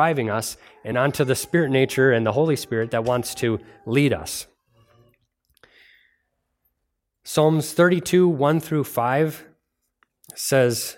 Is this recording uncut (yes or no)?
yes